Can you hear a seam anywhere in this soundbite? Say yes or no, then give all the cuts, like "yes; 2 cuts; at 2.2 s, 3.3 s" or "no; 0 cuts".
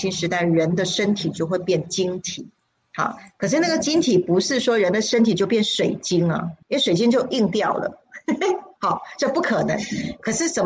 yes; 2 cuts; at 2.6 s, 6.6 s